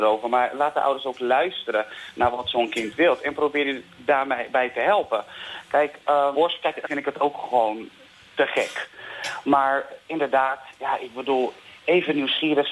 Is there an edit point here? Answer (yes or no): yes